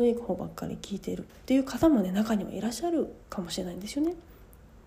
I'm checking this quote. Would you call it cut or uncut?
cut